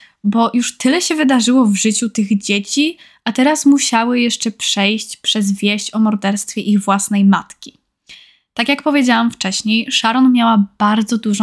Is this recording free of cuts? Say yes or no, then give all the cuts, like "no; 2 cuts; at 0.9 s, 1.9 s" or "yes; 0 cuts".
yes; 0 cuts